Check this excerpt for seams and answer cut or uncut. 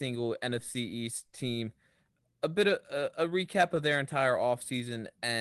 uncut